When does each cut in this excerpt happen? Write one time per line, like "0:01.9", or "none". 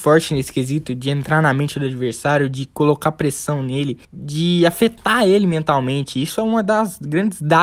0:04.0